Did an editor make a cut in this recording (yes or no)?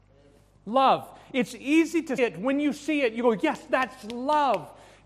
yes